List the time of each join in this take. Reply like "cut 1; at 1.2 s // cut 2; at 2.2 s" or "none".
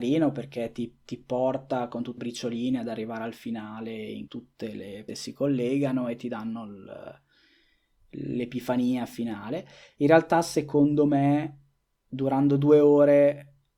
cut 1; at 2.2 s // cut 2; at 4.3 s // cut 3; at 5.1 s